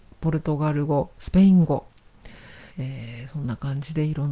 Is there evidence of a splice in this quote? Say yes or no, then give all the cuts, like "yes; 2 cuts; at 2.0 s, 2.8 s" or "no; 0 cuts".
yes; 1 cut; at 2.7 s